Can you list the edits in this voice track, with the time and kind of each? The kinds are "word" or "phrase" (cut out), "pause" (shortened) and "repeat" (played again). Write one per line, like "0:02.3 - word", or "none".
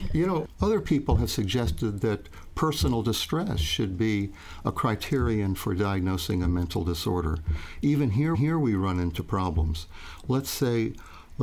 0:08.3 - repeat